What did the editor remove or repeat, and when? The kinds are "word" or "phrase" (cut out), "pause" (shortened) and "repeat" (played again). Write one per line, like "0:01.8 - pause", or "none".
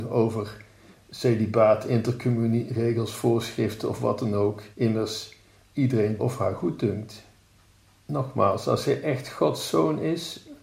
0:04.7 - pause
0:06.2 - phrase

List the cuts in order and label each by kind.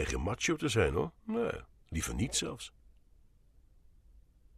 0:01.2 - pause

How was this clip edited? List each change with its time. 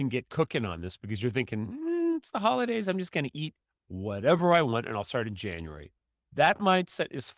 none

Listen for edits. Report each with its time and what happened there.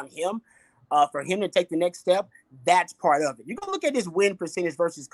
none

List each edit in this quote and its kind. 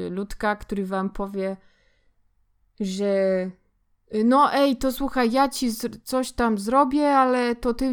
none

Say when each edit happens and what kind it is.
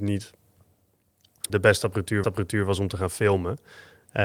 0:01.5 - word
0:02.2 - repeat

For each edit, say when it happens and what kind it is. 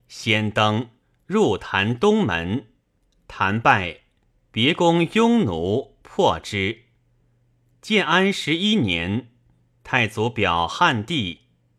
0:01.0 - pause
0:03.0 - pause

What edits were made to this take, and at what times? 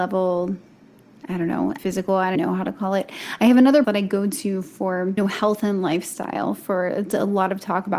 0:01.8 - word
0:02.4 - word
0:03.8 - word
0:05.2 - word

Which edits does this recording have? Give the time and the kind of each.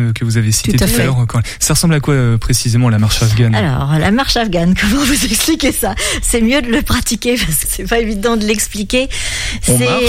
0:07.6 - word

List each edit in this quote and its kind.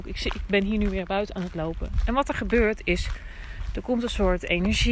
none

